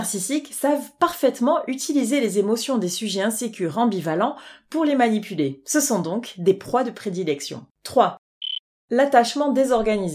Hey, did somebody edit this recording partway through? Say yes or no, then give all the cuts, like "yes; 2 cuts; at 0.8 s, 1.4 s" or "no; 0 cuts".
yes; 1 cut; at 7.7 s